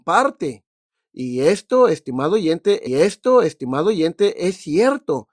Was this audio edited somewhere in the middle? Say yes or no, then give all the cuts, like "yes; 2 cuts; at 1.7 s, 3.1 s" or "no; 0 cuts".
yes; 1 cut; at 2.9 s